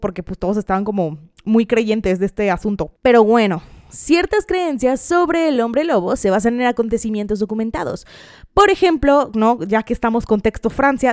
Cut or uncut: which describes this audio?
uncut